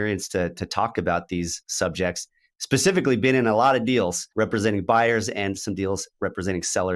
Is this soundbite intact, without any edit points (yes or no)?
no